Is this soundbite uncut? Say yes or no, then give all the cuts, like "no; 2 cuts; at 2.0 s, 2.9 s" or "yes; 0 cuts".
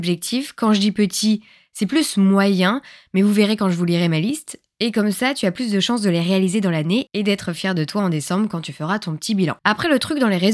yes; 0 cuts